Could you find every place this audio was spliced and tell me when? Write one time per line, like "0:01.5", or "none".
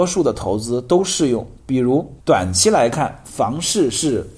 0:02.2

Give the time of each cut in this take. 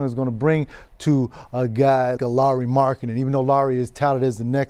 0:02.2

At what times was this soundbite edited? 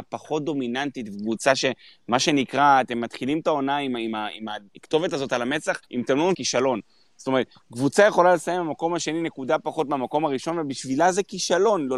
0:04.7
0:05.8
0:06.3

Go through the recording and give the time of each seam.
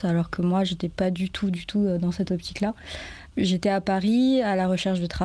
none

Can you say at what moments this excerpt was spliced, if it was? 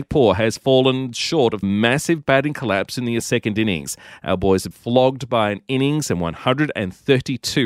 0:01.6
0:03.2
0:04.7

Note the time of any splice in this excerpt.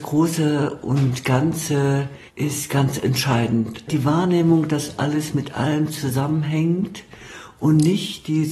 0:02.3

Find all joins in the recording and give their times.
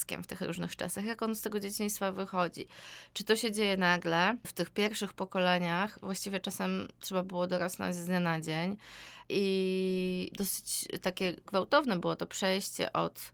none

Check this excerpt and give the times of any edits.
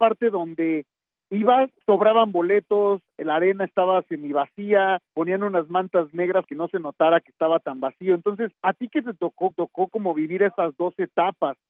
0:01.8
0:05.1
0:06.4
0:08.5
0:09.5

